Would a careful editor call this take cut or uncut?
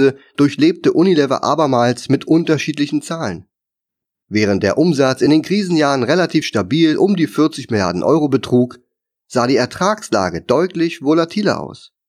uncut